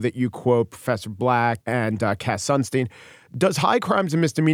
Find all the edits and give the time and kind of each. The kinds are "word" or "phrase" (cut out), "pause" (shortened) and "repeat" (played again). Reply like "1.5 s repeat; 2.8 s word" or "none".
1.6 s word